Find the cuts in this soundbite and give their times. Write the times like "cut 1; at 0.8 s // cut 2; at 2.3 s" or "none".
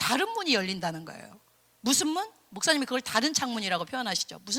none